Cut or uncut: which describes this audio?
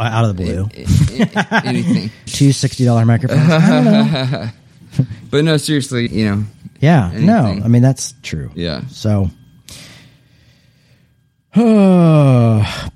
cut